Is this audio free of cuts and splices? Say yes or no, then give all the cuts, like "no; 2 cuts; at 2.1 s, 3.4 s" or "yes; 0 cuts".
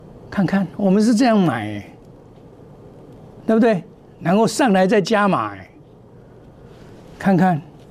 yes; 0 cuts